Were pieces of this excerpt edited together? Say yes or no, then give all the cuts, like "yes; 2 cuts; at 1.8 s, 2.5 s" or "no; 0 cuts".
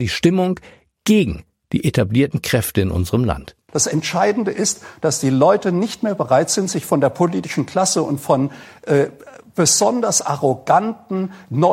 no; 0 cuts